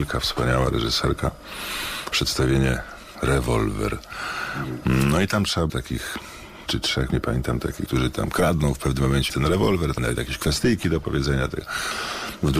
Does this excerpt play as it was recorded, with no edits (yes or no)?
no